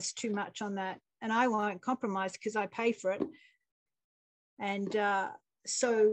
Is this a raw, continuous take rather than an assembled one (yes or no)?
yes